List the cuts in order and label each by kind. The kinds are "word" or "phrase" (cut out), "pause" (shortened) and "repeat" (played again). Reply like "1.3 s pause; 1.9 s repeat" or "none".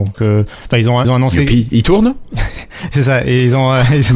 1.0 s word